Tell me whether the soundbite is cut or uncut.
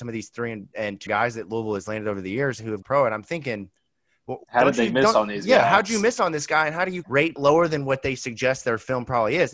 cut